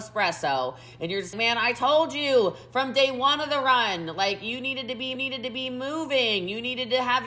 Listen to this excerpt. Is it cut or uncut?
cut